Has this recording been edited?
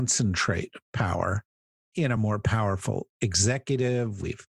no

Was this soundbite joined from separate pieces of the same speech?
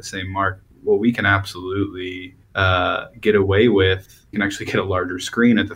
yes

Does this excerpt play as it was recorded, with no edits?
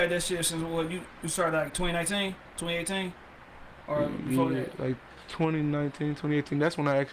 yes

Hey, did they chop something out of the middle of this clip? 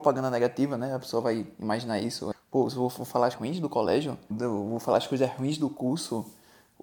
yes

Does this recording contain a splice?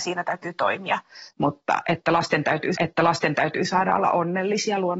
yes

